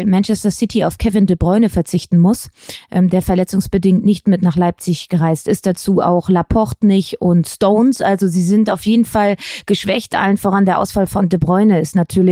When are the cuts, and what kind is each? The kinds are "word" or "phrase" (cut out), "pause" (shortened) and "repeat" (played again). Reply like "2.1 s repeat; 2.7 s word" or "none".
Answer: none